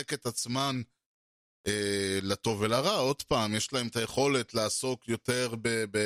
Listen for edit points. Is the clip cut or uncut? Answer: uncut